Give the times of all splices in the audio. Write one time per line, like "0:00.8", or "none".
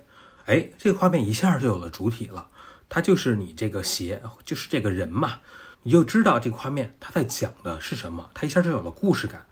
0:05.7